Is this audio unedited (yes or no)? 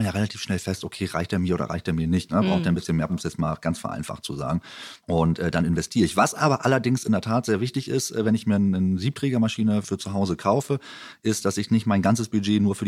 no